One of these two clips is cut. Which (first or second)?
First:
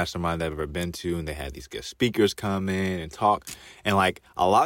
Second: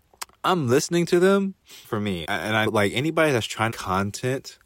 second